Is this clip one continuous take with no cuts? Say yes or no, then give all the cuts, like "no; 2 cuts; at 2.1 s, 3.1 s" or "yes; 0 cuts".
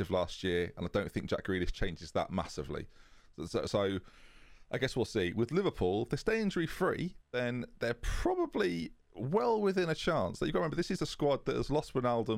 no; 1 cut; at 7.2 s